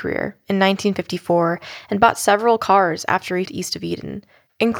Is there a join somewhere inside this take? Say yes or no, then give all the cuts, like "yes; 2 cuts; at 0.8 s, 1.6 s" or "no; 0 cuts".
yes; 1 cut; at 3.5 s